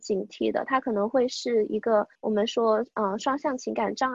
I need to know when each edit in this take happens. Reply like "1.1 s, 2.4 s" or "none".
2.1 s